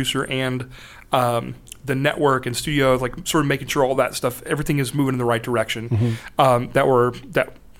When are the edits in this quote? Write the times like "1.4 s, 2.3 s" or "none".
none